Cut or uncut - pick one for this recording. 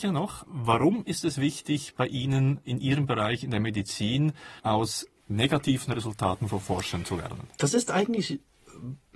cut